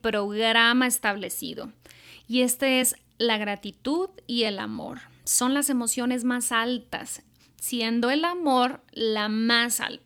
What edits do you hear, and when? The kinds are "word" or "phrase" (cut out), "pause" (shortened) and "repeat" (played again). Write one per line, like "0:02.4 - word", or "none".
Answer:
none